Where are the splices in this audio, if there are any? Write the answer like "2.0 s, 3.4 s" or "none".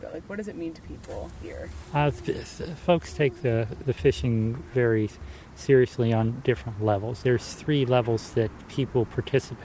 none